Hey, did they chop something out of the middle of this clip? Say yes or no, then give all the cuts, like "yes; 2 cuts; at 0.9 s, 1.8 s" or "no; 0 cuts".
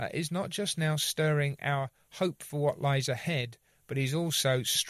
no; 0 cuts